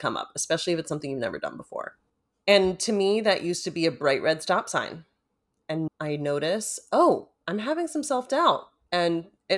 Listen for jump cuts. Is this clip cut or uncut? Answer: cut